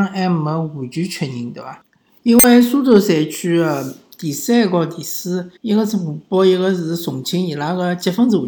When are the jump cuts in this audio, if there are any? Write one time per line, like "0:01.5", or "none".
0:05.6

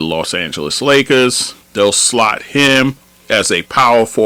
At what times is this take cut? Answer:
0:01.6

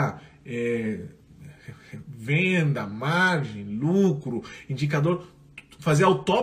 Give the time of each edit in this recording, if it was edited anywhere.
none

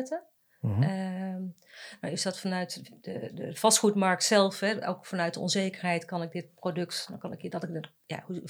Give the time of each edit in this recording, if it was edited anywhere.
none

